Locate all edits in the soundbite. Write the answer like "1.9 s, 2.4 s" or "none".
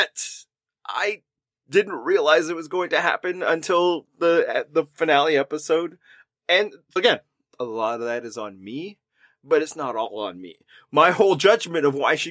7.0 s